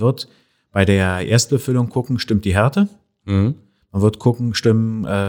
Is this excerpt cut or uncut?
uncut